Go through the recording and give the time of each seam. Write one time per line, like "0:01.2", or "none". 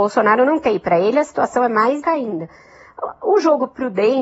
0:02.0